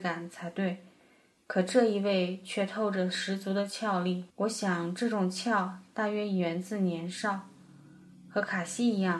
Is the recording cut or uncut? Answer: cut